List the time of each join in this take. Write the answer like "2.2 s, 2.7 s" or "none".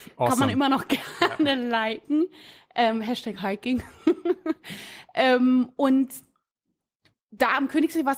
none